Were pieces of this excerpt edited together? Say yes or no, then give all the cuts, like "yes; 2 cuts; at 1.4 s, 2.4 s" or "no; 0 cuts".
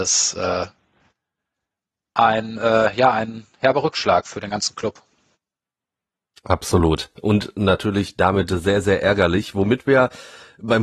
no; 0 cuts